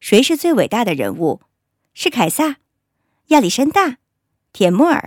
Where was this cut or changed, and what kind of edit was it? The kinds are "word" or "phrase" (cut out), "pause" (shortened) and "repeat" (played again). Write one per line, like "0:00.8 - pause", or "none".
none